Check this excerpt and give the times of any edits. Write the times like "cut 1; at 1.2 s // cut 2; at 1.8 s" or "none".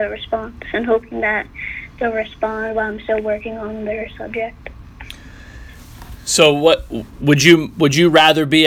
none